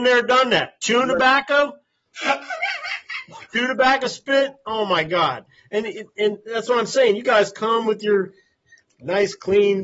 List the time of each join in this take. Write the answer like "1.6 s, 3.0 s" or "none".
none